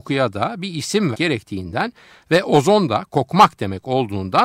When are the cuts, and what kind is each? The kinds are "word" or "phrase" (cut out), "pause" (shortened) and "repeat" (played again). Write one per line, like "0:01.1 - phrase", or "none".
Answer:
0:01.1 - word